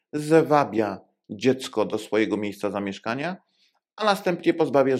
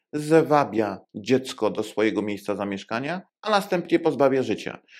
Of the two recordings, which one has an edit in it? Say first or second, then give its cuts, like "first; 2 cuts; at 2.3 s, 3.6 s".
second; 2 cuts; at 1.0 s, 3.3 s